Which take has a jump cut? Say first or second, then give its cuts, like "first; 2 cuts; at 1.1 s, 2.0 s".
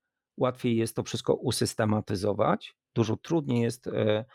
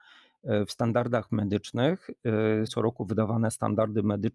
second; 1 cut; at 2.7 s